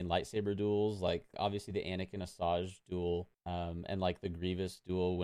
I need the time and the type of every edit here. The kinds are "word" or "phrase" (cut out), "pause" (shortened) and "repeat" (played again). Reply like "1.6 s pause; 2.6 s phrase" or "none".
1.3 s word; 3.3 s pause